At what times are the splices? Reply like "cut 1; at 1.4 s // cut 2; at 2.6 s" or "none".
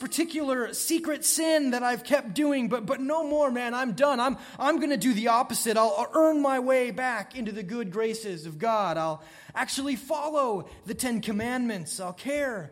none